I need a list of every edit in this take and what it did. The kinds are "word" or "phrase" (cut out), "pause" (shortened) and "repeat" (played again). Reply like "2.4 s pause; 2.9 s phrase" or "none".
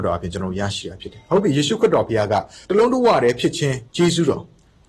2.6 s pause; 3.9 s pause